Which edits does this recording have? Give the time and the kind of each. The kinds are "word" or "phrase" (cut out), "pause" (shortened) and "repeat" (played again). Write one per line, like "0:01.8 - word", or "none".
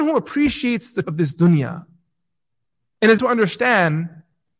0:01.0 - word
0:03.2 - word